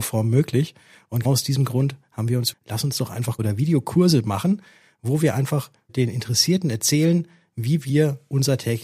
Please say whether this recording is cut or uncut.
cut